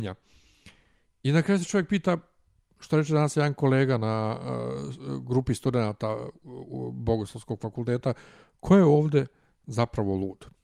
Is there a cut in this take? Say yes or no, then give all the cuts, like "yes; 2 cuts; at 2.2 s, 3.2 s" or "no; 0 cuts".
no; 0 cuts